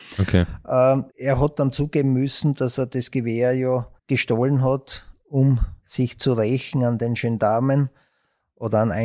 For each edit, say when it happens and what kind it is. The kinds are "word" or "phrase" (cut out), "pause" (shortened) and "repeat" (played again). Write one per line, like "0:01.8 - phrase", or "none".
0:01.1 - pause
0:04.0 - pause
0:05.8 - pause